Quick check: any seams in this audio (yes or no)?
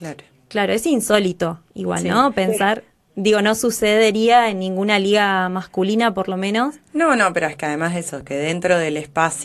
no